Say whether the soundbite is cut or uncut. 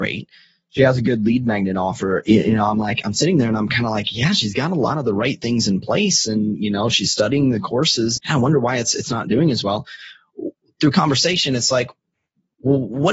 cut